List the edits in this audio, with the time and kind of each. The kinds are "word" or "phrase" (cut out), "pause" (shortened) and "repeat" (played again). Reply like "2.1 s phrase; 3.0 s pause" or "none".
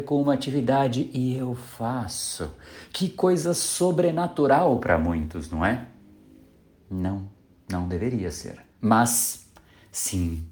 8.7 s pause